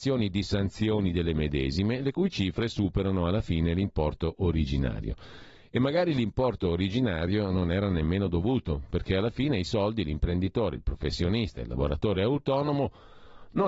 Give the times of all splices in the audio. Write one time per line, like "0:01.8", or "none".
none